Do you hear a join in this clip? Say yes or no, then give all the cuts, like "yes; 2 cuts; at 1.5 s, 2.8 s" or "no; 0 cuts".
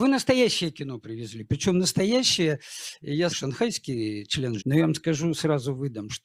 yes; 2 cuts; at 3.3 s, 4.6 s